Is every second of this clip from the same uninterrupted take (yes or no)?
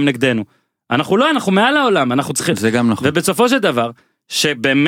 yes